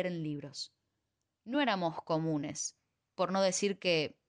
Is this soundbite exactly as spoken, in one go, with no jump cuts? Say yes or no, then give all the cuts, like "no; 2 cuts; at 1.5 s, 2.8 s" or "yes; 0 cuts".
yes; 0 cuts